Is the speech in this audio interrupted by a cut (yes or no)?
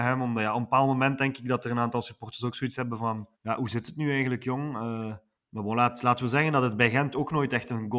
yes